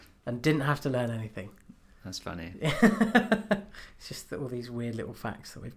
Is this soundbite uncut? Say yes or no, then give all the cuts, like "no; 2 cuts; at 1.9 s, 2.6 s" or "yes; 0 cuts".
yes; 0 cuts